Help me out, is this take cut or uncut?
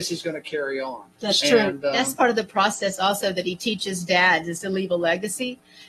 cut